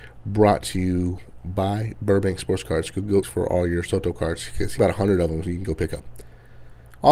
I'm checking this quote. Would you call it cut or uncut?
cut